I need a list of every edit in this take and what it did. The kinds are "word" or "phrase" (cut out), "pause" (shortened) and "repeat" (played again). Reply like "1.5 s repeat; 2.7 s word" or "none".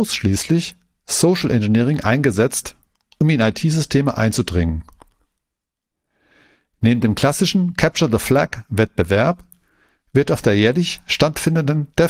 none